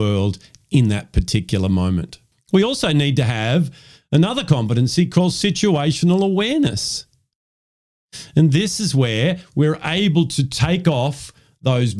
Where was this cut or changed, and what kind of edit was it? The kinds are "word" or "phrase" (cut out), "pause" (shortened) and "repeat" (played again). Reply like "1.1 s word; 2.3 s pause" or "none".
none